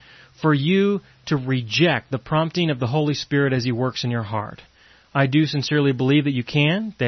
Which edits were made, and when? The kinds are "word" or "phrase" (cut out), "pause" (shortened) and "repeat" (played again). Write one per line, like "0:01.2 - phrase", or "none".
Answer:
none